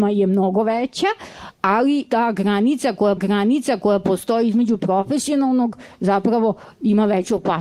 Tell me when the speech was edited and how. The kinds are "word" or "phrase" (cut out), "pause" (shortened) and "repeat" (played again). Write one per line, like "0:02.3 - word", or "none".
0:02.1 - word
0:03.2 - repeat
0:04.8 - phrase